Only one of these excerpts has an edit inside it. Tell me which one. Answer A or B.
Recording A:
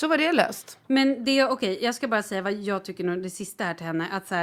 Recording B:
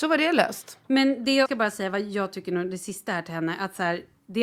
B